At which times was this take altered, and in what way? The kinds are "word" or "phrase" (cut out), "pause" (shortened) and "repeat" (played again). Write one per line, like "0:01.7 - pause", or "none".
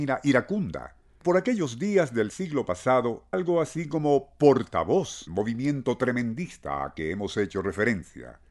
0:01.2 - word
0:03.3 - word
0:05.3 - word